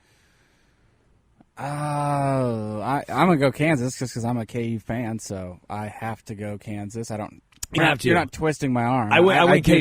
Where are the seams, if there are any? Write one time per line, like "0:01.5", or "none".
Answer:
0:07.8